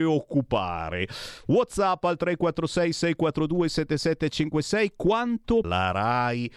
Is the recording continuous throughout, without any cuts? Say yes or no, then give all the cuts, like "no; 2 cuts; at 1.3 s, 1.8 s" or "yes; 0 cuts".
no; 1 cut; at 5.6 s